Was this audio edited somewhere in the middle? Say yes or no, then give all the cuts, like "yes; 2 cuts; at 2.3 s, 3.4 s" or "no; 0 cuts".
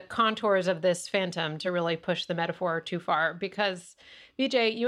no; 0 cuts